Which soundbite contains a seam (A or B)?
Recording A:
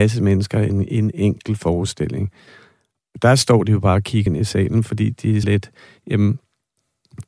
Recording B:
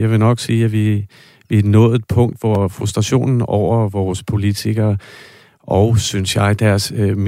A